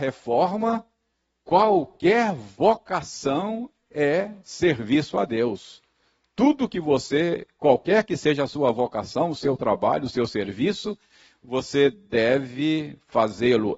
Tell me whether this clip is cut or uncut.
uncut